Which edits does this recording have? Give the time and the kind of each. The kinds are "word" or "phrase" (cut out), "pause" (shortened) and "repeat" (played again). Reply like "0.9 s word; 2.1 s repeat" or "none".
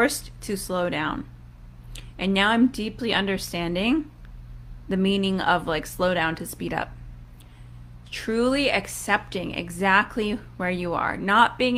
none